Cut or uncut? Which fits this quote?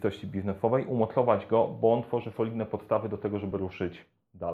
uncut